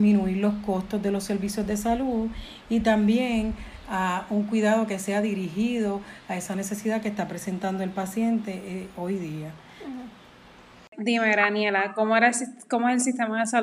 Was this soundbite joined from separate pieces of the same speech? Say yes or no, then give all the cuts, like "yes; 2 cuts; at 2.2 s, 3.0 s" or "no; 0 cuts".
no; 0 cuts